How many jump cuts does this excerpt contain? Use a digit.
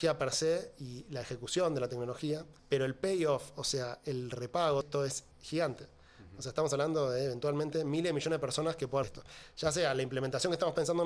4